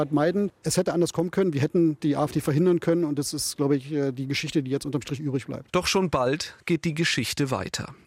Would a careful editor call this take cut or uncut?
uncut